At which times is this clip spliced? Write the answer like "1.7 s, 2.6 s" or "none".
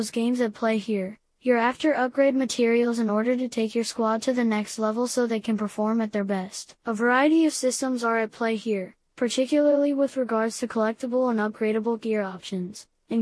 6.8 s